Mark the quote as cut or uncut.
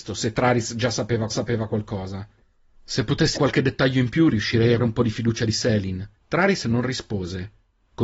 cut